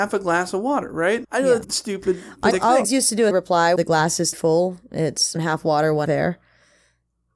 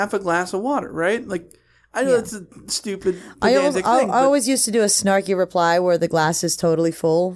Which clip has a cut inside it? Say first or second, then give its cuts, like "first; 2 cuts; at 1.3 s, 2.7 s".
first; 9 cuts; at 1.2 s, 1.6 s, 2.5 s, 2.8 s, 3.3 s, 3.8 s, 4.3 s, 5.4 s, 6.1 s